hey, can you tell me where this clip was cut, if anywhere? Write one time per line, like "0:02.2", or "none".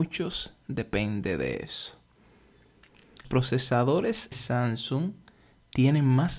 0:03.2
0:04.3